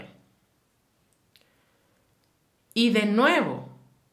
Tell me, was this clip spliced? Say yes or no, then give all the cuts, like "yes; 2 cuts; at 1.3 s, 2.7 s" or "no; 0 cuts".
no; 0 cuts